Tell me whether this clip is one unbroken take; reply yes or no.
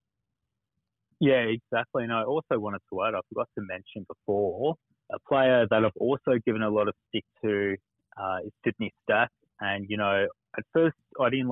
no